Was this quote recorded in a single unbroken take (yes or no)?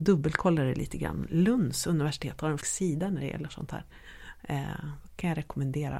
no